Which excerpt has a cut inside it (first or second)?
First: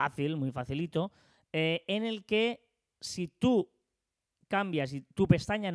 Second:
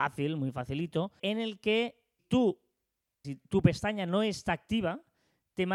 second